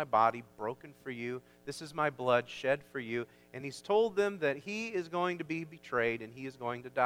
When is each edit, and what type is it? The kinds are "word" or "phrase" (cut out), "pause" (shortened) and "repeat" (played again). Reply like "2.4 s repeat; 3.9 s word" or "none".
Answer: none

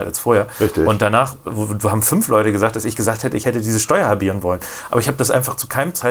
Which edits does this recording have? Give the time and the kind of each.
none

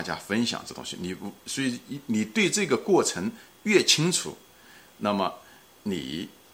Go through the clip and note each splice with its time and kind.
none

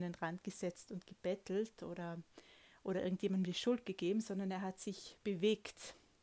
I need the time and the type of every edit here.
none

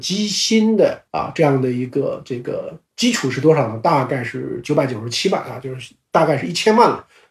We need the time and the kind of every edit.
1.1 s pause; 2.9 s pause

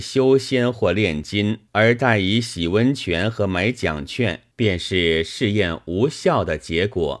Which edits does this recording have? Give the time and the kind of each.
1.7 s pause; 4.5 s pause

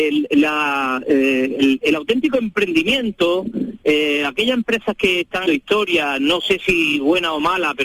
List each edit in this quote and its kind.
5.5 s word

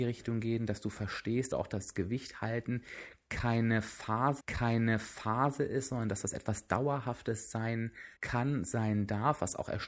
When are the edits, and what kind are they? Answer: 1.5 s phrase; 4.4 s repeat; 8.2 s pause

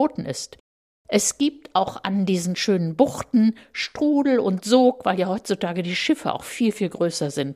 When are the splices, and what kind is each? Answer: none

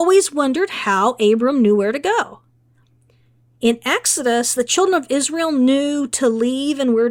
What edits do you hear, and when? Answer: none

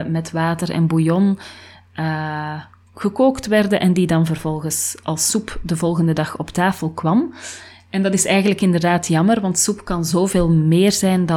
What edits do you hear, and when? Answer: none

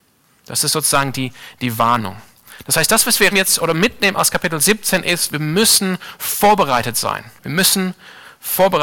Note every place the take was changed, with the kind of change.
3.3 s word; 7.4 s pause

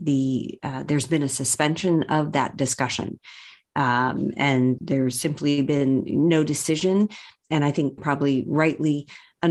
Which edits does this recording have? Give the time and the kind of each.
4.8 s word; 8.0 s phrase

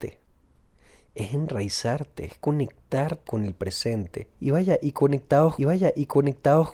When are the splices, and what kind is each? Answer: 3.3 s word; 4.3 s pause; 5.6 s repeat

